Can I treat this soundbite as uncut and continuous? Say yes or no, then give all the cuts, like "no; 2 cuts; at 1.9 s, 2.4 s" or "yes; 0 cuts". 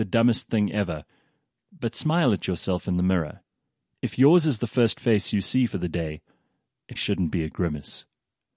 no; 1 cut; at 7.0 s